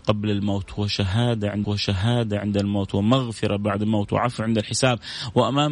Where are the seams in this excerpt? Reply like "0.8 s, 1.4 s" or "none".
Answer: 1.6 s